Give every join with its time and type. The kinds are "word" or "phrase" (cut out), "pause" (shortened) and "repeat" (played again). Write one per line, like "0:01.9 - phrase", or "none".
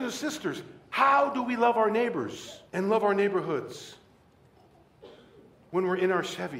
0:02.7 - pause